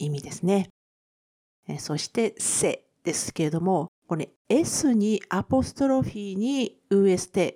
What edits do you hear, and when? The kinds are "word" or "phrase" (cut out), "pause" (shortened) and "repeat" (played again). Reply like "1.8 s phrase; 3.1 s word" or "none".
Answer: 4.0 s pause

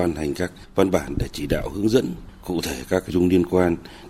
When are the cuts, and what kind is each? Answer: 3.1 s word

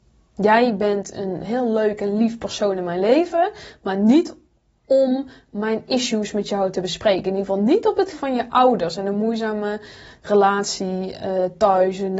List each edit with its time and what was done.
8.1 s word

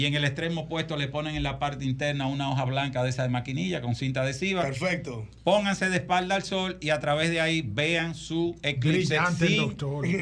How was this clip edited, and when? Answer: none

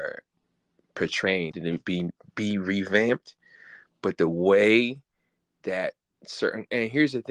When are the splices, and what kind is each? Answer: 1.5 s phrase

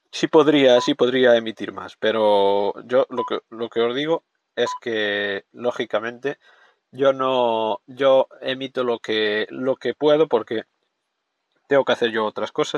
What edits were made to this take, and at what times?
none

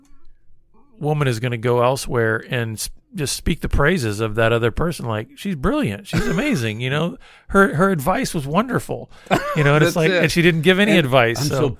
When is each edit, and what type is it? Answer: none

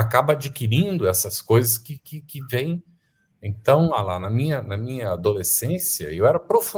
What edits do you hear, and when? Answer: none

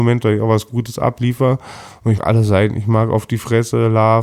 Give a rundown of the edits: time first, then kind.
2.2 s word

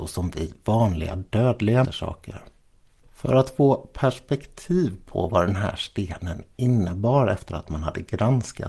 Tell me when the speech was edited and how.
1.8 s word

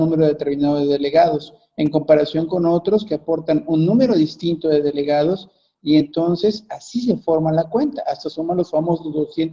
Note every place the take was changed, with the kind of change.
none

